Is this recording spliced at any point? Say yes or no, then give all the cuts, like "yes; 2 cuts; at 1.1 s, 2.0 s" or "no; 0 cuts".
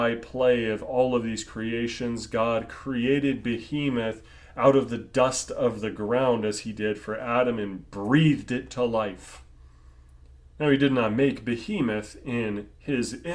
no; 0 cuts